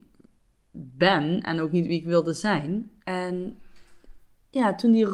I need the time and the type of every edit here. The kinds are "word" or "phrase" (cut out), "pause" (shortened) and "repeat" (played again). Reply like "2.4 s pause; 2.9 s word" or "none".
3.0 s pause

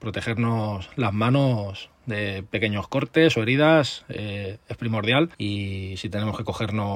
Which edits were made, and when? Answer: 5.3 s pause

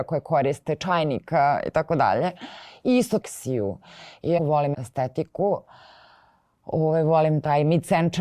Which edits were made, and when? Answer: 3.2 s phrase; 4.4 s word; 4.7 s word

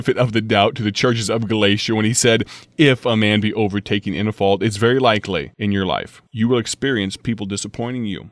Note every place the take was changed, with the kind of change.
5.5 s pause; 6.3 s pause

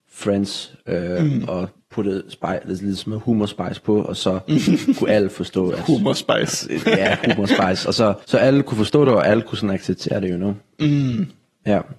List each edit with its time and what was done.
1.7 s pause; 8.2 s pause

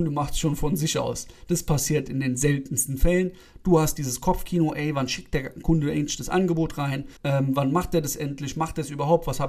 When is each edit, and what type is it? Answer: 7.2 s pause

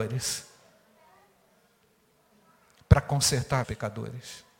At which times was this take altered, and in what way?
3.6 s word

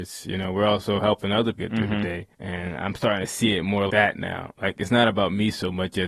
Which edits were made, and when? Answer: 1.5 s word; 2.3 s pause; 3.9 s word

